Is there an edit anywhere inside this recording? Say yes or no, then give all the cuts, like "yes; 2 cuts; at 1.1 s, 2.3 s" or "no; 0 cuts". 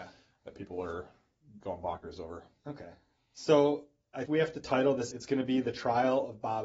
yes; 2 cuts; at 4.3 s, 5.1 s